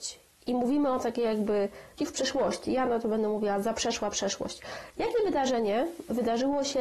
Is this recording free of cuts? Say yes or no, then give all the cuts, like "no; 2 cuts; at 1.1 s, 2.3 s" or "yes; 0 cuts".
no; 1 cut; at 2.0 s